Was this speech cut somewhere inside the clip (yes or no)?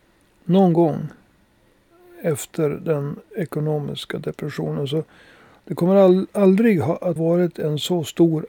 yes